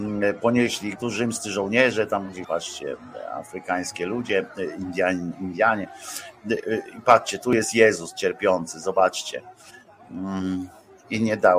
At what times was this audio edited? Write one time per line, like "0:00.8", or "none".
0:01.0
0:02.4